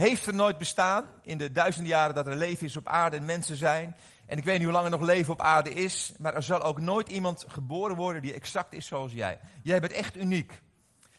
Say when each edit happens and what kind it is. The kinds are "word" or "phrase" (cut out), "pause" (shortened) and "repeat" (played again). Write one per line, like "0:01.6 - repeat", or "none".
none